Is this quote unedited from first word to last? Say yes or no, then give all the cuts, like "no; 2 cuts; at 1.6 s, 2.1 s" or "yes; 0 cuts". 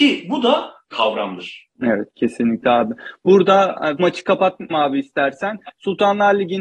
no; 4 cuts; at 0.9 s, 1.7 s, 4.0 s, 4.7 s